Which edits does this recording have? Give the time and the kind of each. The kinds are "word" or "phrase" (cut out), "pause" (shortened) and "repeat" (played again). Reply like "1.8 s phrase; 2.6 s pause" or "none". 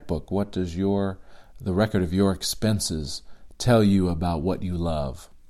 none